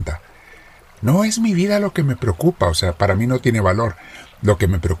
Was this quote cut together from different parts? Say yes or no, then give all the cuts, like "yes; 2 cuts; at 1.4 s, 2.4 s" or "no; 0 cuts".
no; 0 cuts